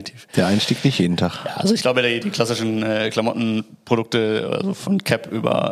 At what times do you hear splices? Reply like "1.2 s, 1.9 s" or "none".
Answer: 2.2 s